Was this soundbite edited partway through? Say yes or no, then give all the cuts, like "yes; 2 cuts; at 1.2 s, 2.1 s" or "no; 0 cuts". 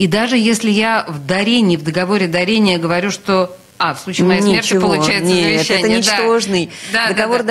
no; 0 cuts